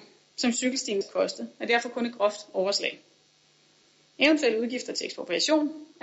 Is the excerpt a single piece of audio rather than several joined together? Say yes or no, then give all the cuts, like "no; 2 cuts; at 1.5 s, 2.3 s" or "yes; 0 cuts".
no; 1 cut; at 1.0 s